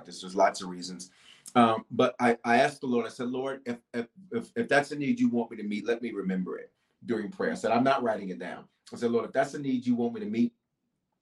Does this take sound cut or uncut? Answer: uncut